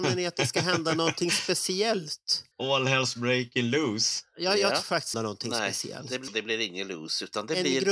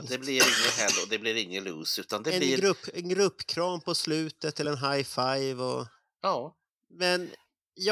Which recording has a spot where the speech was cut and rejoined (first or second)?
first